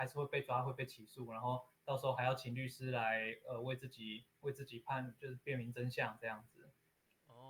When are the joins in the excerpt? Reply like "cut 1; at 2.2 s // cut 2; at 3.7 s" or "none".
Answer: cut 1; at 4.3 s